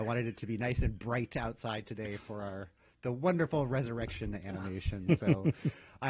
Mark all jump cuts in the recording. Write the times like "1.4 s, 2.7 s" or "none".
none